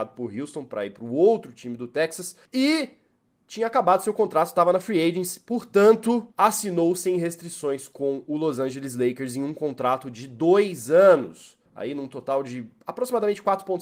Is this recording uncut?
no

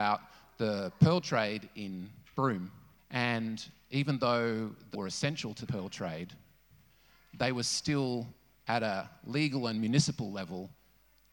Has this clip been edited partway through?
yes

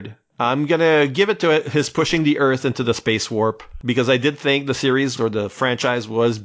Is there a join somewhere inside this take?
yes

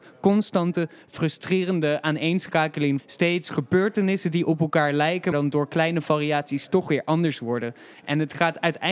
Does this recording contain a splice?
yes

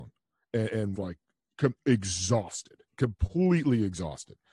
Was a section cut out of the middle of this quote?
yes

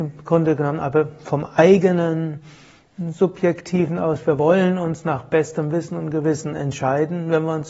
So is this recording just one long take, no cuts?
yes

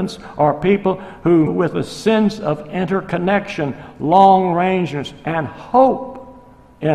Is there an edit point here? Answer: yes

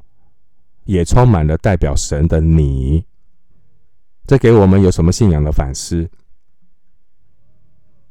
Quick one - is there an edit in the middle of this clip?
yes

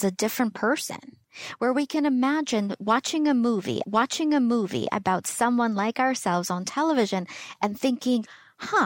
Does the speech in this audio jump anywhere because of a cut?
yes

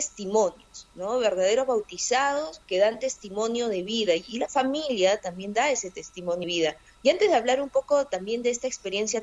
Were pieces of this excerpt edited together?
yes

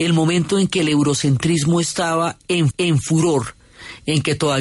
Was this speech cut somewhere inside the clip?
yes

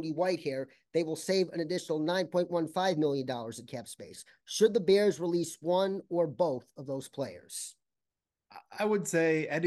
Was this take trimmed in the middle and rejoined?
no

